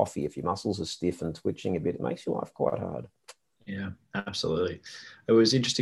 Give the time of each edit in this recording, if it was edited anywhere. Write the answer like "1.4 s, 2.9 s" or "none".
none